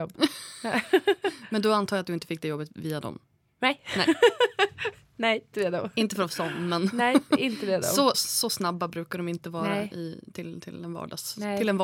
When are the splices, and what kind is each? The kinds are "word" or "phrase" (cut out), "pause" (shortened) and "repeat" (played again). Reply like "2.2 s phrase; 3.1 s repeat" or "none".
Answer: 5.5 s word; 8.1 s word